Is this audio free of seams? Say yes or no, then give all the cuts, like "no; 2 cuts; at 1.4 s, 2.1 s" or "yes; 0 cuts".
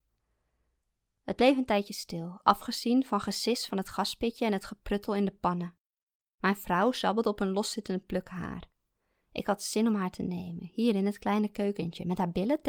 yes; 0 cuts